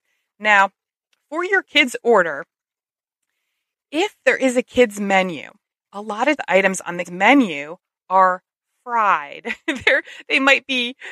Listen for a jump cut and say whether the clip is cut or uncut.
cut